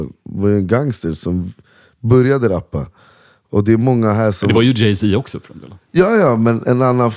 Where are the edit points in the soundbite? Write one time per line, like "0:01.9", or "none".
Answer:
none